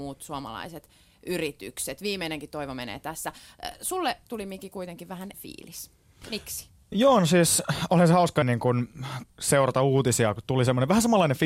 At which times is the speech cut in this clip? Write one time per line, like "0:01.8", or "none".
0:05.3
0:08.4